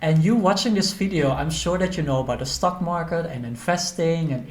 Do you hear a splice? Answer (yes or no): no